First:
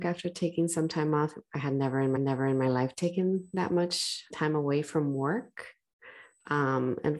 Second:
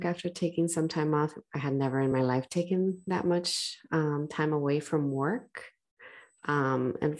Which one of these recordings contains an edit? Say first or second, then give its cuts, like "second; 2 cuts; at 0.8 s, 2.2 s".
first; 2 cuts; at 2.2 s, 4.3 s